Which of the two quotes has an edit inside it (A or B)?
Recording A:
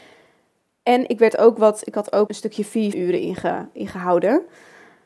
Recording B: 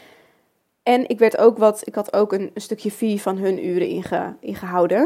A